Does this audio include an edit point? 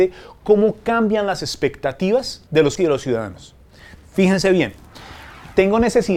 yes; 2 cuts; at 2.5 s, 2.8 s

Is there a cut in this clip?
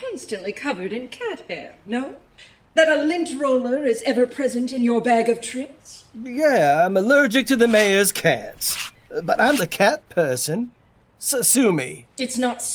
yes; 1 cut; at 9.6 s

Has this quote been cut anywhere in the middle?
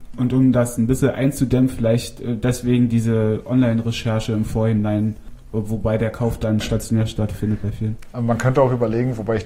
no; 0 cuts

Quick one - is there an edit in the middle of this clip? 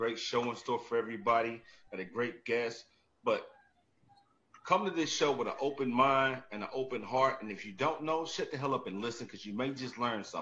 no; 0 cuts

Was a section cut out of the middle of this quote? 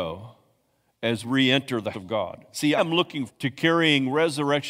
yes; 4 cuts; at 1.2 s, 1.9 s, 2.8 s, 3.3 s

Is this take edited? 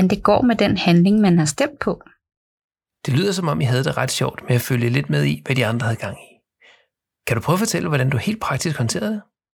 no; 0 cuts

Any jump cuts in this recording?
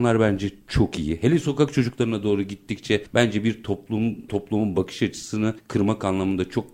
no; 0 cuts

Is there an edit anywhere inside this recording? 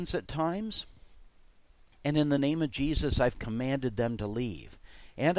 no; 0 cuts

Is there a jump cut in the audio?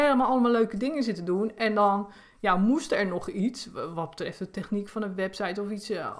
no; 0 cuts

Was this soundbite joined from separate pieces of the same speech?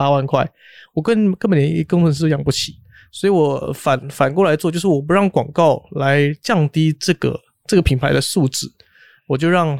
no; 0 cuts

